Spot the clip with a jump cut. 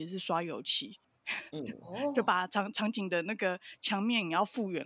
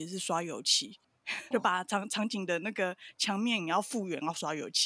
second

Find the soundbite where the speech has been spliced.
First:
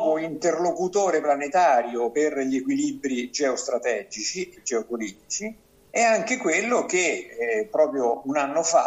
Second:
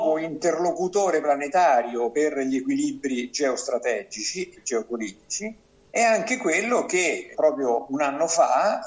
second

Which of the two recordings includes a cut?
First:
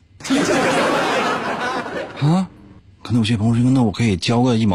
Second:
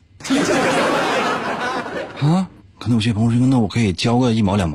second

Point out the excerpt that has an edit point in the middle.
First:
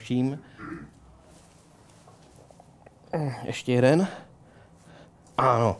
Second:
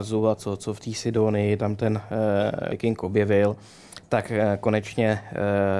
second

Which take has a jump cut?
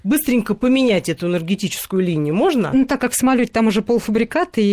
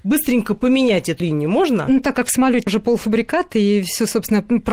second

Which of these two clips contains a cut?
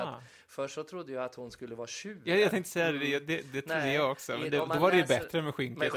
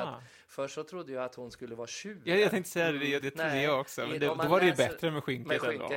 second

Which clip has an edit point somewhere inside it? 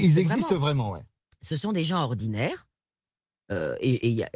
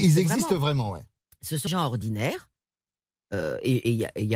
second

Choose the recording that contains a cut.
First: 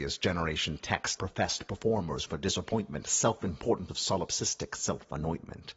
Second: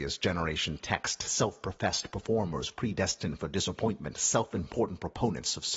first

